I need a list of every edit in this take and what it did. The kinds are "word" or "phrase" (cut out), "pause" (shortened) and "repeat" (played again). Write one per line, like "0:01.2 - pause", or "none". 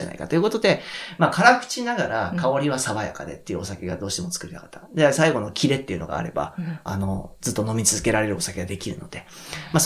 0:06.9 - phrase